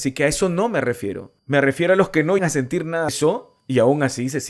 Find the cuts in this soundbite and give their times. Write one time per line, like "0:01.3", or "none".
0:01.4
0:02.4
0:03.1